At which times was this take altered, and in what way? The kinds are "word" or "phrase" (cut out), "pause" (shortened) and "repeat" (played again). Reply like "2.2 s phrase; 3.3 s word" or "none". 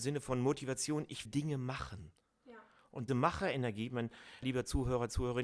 1.3 s word; 3.1 s word; 4.4 s word